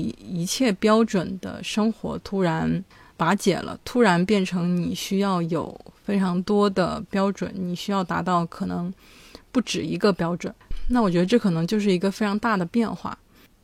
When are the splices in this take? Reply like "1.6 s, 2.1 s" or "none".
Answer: none